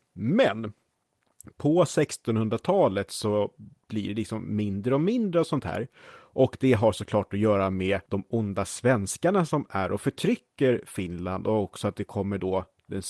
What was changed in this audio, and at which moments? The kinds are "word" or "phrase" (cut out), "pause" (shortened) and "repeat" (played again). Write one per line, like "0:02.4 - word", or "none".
0:08.1 - pause